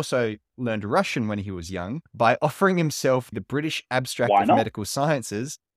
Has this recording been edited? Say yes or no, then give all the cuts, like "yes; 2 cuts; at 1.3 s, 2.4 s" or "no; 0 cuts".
yes; 2 cuts; at 2.1 s, 3.3 s